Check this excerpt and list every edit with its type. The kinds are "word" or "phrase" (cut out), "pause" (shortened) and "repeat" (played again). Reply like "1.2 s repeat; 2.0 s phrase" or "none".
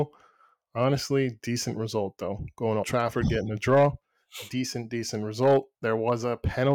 2.8 s word; 5.7 s pause

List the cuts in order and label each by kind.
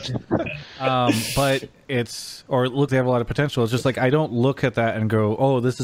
1.8 s word; 2.9 s word

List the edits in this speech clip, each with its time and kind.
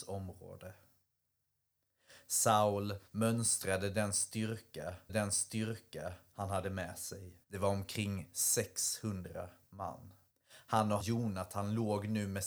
3.1 s pause; 5.1 s repeat; 7.4 s pause; 10.3 s pause; 11.0 s phrase

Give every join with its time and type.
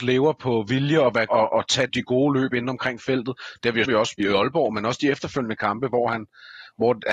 1.3 s phrase; 1.9 s word; 3.9 s word; 4.2 s word

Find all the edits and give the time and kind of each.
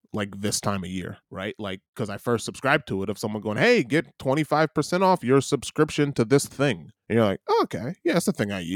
1.2 s pause; 7.0 s pause

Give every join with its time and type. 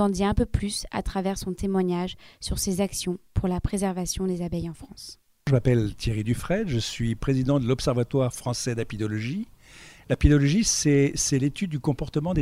none

